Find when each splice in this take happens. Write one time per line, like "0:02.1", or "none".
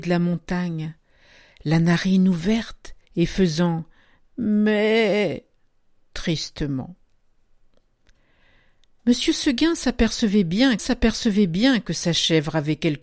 0:03.0
0:10.8